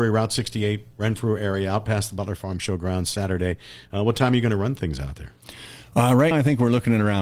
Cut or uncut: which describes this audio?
cut